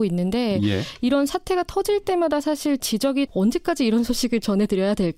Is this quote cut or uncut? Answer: cut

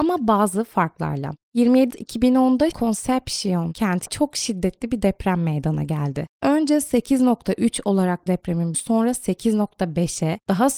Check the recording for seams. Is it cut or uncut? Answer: cut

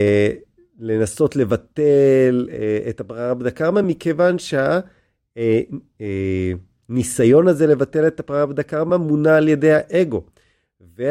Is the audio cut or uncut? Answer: uncut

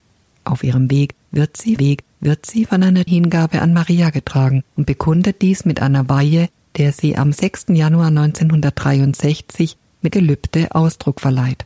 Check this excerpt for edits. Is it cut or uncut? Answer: cut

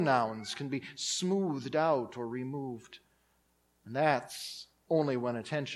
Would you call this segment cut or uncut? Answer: uncut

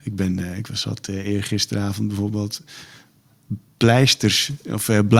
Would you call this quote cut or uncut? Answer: uncut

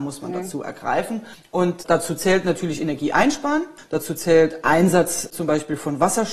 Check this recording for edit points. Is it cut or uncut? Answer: uncut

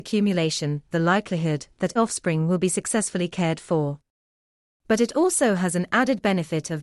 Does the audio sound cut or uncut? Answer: cut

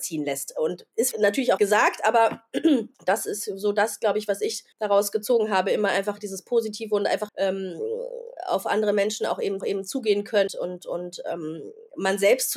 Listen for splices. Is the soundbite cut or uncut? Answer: cut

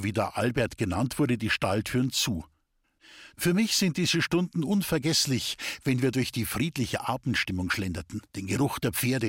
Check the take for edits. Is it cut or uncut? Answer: cut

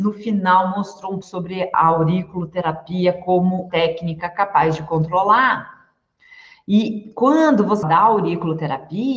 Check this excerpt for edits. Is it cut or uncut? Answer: cut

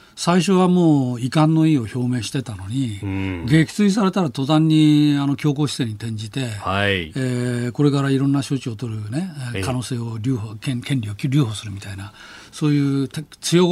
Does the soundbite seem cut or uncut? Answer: uncut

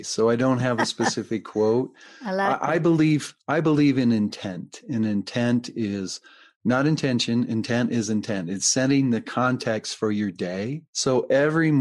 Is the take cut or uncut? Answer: uncut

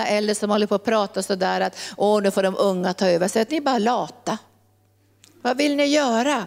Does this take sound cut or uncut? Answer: uncut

